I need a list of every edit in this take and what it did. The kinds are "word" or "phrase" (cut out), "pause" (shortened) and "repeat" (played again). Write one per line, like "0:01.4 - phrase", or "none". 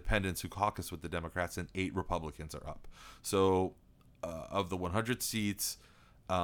none